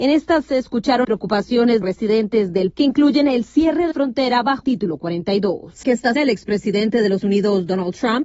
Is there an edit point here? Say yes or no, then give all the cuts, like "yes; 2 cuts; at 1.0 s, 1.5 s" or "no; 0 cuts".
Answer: yes; 8 cuts; at 1.0 s, 1.8 s, 2.7 s, 3.9 s, 4.6 s, 5.8 s, 6.2 s, 7.2 s